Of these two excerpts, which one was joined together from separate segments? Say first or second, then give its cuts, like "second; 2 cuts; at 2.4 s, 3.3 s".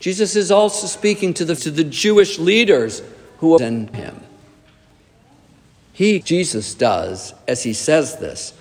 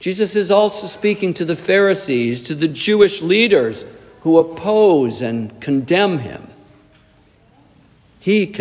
first; 4 cuts; at 1.6 s, 3.6 s, 3.9 s, 6.2 s